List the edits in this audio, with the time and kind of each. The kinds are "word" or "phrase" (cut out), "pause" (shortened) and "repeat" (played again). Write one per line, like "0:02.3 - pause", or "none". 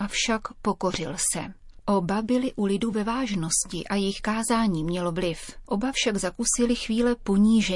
none